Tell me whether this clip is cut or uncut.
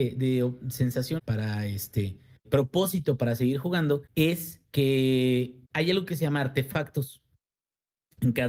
cut